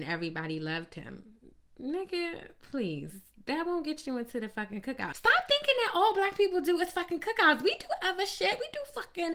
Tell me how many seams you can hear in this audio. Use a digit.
1